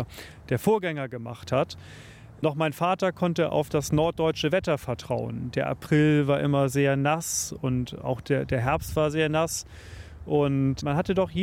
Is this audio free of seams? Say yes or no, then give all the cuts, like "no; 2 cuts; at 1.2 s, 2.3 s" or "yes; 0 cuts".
yes; 0 cuts